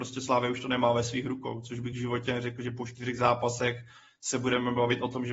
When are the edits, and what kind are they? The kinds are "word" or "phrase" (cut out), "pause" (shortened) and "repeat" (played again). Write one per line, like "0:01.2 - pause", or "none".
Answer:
none